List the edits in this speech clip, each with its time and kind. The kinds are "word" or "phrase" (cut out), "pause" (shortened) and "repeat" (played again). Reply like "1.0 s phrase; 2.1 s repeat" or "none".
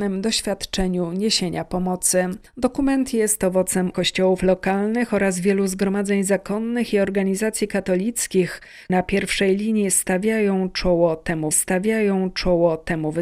2.5 s pause; 3.9 s phrase; 8.9 s word; 11.5 s repeat